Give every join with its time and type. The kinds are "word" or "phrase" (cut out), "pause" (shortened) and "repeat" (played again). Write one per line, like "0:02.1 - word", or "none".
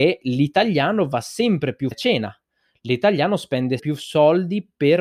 0:01.9 - word
0:03.8 - word